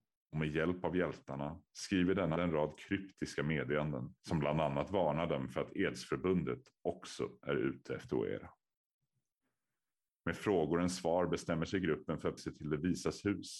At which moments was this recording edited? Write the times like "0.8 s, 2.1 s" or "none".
2.4 s, 4.2 s, 10.4 s, 12.4 s